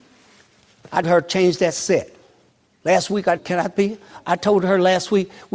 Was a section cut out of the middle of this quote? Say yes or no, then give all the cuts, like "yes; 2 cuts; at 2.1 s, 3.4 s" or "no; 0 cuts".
yes; 3 cuts; at 1.0 s, 2.5 s, 3.4 s